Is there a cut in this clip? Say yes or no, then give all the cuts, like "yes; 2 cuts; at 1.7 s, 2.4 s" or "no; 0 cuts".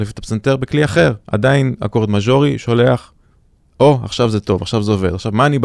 no; 0 cuts